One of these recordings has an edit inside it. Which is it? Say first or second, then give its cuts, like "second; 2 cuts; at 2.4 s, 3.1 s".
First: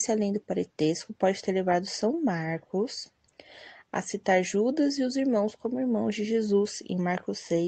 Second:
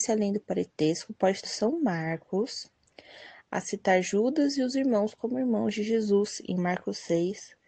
second; 1 cut; at 1.5 s